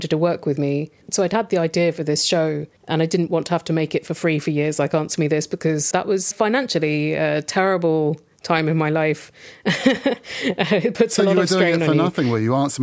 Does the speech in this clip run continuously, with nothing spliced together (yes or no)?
no